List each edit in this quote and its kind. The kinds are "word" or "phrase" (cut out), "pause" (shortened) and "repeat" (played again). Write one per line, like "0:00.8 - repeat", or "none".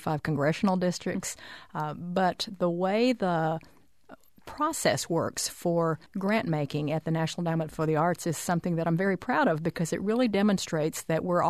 0:06.1 - pause